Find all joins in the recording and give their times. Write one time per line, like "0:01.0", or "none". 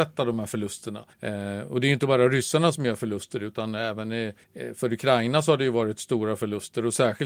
0:01.1
0:04.4